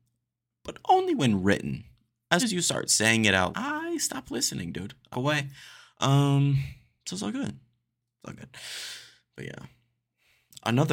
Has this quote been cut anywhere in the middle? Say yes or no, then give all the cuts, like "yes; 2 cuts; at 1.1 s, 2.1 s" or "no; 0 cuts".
yes; 3 cuts; at 2.4 s, 3.5 s, 5.1 s